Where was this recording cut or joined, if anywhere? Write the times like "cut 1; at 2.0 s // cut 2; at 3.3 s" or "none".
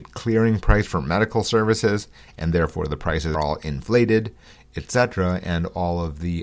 cut 1; at 3.3 s